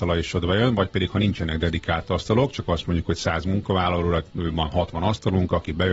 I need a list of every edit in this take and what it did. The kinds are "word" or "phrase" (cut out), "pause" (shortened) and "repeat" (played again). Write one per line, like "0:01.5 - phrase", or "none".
none